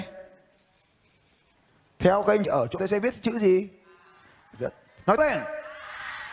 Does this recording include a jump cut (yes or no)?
yes